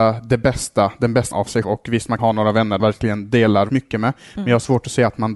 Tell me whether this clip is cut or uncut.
cut